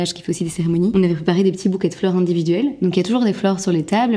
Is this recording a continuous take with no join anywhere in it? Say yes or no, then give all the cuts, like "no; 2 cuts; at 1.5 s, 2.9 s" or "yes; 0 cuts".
yes; 0 cuts